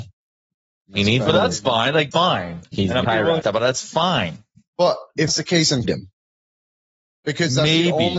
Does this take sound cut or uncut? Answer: cut